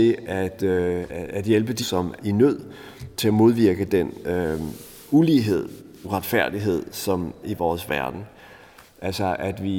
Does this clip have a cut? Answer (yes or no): yes